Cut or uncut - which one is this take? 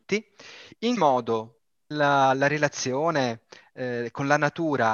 cut